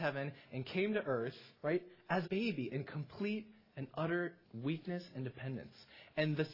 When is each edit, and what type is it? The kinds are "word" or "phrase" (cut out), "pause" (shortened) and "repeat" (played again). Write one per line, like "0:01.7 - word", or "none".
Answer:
0:01.6 - pause
0:02.2 - word
0:04.4 - pause